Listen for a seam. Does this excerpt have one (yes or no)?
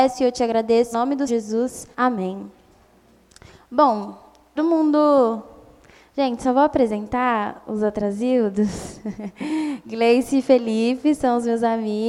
yes